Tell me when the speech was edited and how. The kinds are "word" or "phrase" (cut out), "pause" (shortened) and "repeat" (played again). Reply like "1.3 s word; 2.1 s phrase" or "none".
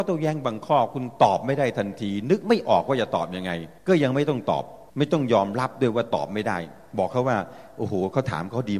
3.8 s pause; 4.9 s pause